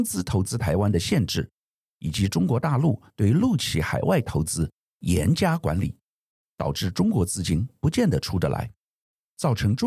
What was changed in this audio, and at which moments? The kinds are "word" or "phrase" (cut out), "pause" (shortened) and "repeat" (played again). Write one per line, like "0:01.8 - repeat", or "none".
0:03.1 - pause